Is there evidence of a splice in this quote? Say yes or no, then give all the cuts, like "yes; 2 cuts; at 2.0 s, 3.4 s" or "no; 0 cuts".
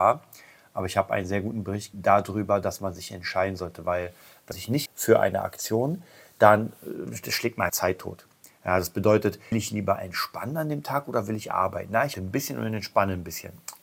yes; 6 cuts; at 1.9 s, 4.5 s, 4.9 s, 7.7 s, 9.5 s, 12.1 s